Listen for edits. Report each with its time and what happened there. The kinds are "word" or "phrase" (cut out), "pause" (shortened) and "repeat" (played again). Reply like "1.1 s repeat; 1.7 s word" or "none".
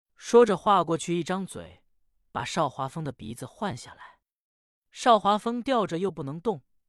none